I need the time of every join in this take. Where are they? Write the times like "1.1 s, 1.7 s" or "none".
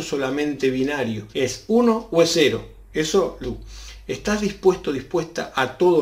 1.3 s, 3.4 s